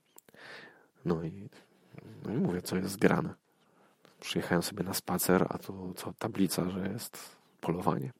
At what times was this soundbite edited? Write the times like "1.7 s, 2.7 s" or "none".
none

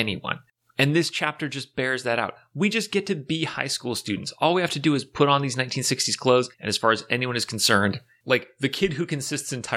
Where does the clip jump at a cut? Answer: 6.5 s

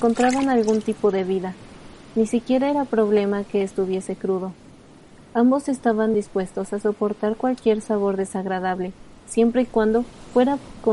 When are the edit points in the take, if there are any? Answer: none

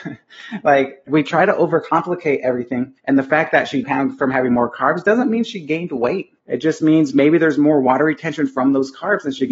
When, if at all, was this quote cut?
1.1 s, 3.0 s, 3.8 s, 6.4 s

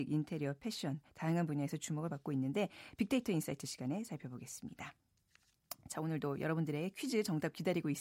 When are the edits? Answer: none

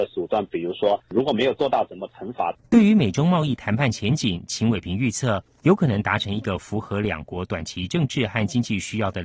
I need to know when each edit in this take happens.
2.6 s

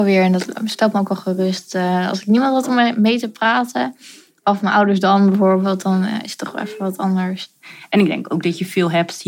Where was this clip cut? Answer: none

